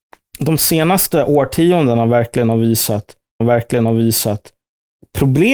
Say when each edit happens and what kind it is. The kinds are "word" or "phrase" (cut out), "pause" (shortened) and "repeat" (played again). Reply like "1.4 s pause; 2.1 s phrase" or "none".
3.4 s repeat